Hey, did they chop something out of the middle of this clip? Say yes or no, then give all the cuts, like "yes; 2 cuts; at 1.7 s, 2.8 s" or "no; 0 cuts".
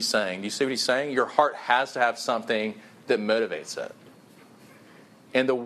no; 0 cuts